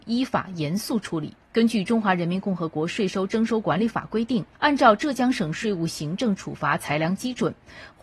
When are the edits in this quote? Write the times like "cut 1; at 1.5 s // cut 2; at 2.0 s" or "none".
cut 1; at 1.4 s // cut 2; at 4.5 s

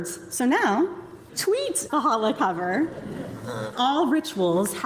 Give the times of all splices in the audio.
cut 1; at 1.3 s // cut 2; at 1.9 s // cut 3; at 3.7 s

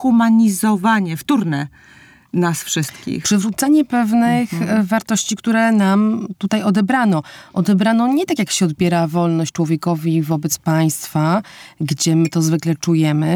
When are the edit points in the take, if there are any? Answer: none

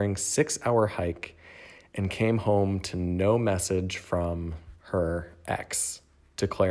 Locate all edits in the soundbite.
cut 1; at 4.8 s

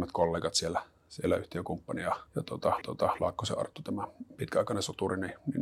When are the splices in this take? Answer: cut 1; at 2.3 s // cut 2; at 2.8 s

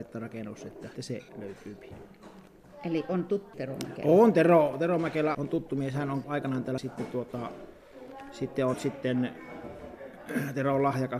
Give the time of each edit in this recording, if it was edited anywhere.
cut 1; at 0.9 s // cut 2; at 1.3 s // cut 3; at 3.5 s // cut 4; at 5.3 s // cut 5; at 6.2 s // cut 6; at 6.8 s // cut 7; at 8.7 s

